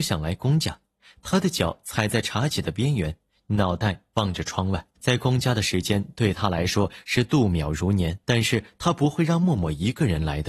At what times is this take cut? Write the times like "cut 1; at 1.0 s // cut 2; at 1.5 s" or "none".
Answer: cut 1; at 5.0 s // cut 2; at 8.2 s